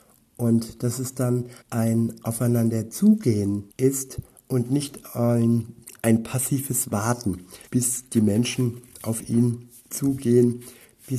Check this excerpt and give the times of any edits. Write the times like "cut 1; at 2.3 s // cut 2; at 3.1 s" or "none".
cut 1; at 1.6 s // cut 2; at 3.7 s // cut 3; at 7.7 s